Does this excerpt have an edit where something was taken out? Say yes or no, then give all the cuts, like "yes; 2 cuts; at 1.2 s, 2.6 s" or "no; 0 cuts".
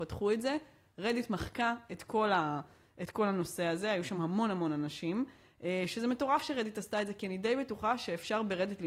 no; 0 cuts